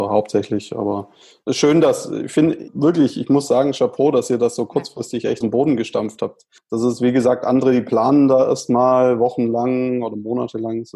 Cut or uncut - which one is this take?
cut